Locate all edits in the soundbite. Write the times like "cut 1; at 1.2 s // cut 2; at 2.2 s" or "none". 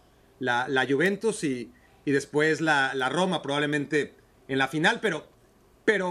none